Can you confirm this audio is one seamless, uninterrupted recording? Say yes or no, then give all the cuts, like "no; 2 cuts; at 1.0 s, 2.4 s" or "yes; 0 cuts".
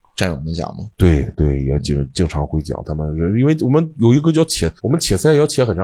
no; 1 cut; at 4.8 s